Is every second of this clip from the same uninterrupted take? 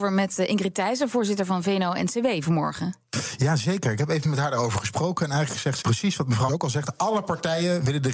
no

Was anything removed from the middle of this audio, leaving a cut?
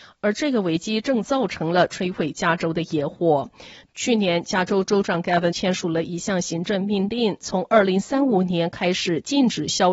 yes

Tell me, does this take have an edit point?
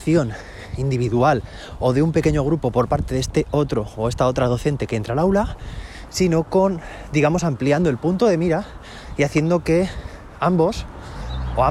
no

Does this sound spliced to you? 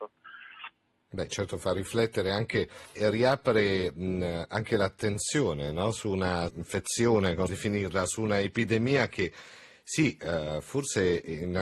yes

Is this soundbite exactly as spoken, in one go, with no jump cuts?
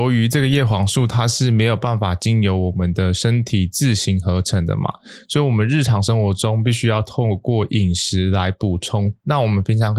yes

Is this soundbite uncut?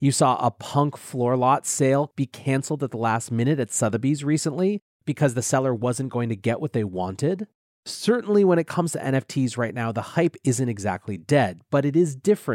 yes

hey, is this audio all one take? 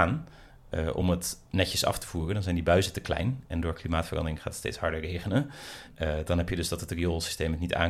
yes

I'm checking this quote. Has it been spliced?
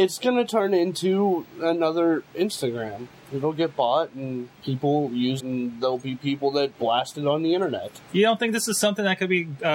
yes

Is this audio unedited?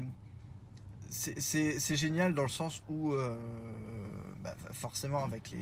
yes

